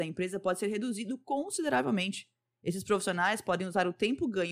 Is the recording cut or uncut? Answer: uncut